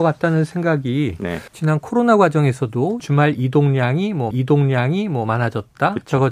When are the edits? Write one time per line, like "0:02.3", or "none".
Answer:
0:01.5
0:03.0
0:04.3